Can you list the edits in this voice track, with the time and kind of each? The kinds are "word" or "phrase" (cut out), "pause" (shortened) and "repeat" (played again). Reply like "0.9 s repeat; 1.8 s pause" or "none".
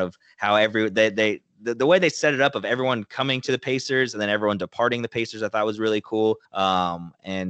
6.5 s pause